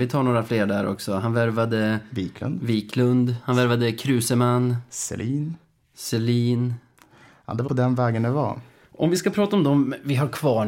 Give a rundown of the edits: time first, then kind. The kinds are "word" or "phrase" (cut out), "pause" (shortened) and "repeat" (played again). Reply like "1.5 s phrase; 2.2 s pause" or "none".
7.7 s word

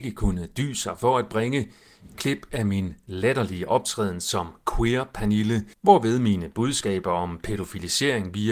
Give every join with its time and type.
5.7 s pause

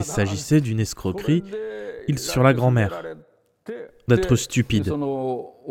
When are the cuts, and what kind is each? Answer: 2.3 s phrase; 4.1 s word

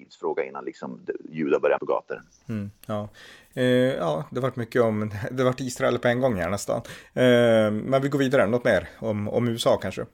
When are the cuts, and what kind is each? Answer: 1.8 s word

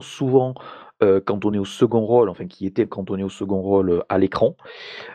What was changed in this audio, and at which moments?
none

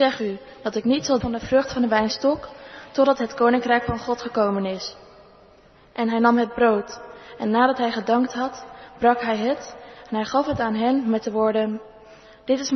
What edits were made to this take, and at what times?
1.2 s word

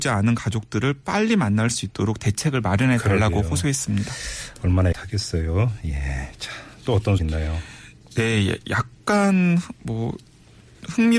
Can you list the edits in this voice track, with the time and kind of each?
4.9 s word; 7.2 s word; 9.8 s pause

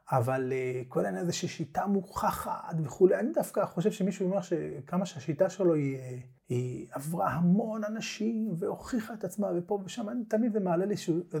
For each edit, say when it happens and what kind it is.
6.4 s pause

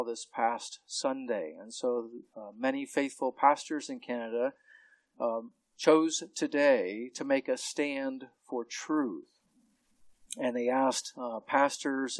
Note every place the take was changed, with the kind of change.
none

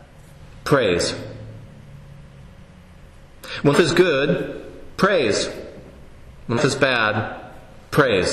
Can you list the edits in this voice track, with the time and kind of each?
3.7 s word; 6.6 s word

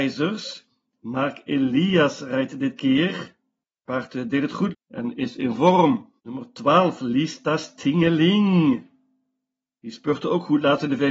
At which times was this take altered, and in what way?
4.7 s phrase; 6.2 s pause

